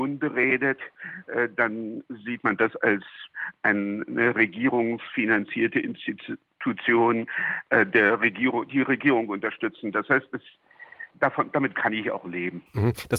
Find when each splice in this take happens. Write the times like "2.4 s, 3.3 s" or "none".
11.1 s